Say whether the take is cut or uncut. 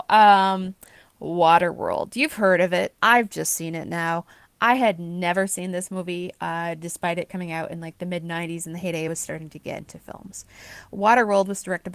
cut